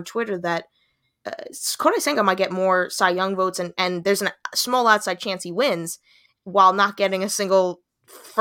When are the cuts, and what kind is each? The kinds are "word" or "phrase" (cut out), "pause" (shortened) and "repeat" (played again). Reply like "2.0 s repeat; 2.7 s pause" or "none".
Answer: none